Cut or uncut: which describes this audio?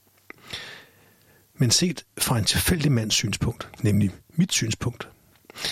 cut